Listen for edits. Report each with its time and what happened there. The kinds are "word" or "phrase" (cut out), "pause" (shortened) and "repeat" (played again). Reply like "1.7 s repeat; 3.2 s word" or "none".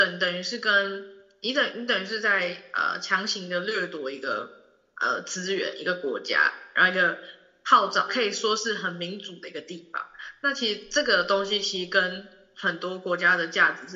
8.1 s word